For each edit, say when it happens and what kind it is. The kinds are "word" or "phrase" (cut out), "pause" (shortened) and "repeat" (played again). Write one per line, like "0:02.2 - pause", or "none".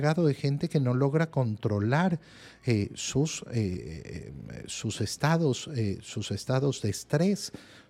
none